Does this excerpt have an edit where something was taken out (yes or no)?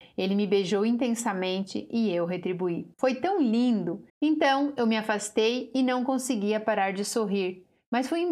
yes